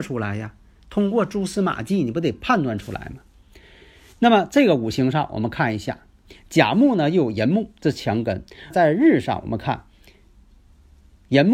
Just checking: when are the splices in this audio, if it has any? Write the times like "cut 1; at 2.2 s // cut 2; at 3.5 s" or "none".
cut 1; at 7.8 s // cut 2; at 8.7 s